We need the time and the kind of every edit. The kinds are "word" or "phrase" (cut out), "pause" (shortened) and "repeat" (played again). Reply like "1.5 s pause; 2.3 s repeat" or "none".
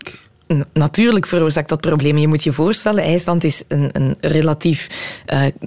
none